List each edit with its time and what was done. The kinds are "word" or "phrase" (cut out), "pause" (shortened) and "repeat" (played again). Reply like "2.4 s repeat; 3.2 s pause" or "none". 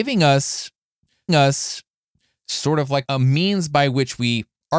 1.3 s repeat; 3.0 s word